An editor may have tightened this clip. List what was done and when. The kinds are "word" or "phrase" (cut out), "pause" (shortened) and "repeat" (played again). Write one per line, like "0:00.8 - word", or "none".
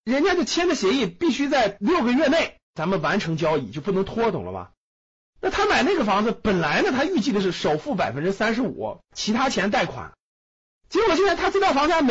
0:02.6 - pause
0:09.0 - pause